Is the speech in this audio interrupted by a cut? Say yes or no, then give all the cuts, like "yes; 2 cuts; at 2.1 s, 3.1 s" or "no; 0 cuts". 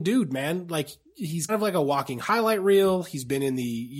yes; 1 cut; at 1.5 s